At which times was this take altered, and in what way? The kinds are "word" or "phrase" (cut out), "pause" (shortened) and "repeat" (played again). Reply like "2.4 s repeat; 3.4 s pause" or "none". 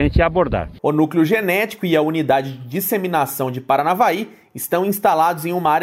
none